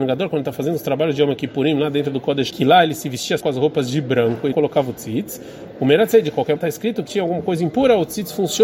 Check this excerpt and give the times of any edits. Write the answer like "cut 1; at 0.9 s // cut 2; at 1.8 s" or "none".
cut 1; at 2.5 s // cut 2; at 3.4 s // cut 3; at 4.5 s // cut 4; at 6.6 s // cut 5; at 7.1 s